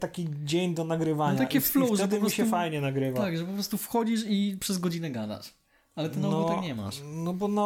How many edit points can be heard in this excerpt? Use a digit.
0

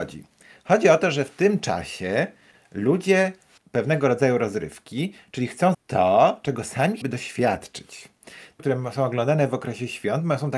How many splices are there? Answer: 4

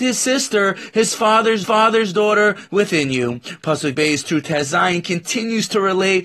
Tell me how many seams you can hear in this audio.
2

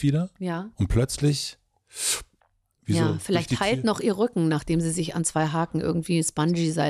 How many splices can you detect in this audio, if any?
1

